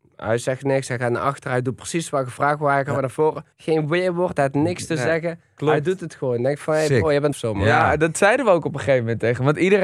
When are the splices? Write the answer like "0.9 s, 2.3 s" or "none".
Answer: 3.5 s, 7.3 s